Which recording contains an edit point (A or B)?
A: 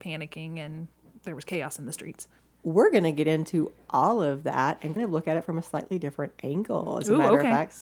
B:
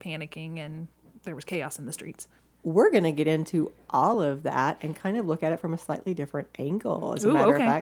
A